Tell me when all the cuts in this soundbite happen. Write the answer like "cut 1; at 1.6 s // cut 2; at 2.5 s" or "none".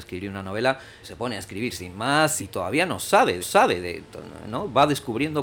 cut 1; at 1.0 s // cut 2; at 2.4 s // cut 3; at 3.4 s